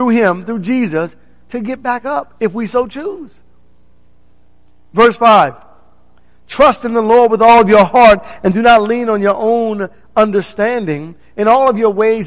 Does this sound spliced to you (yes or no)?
no